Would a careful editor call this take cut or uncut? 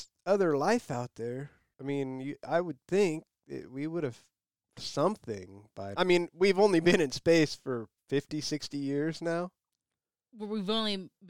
cut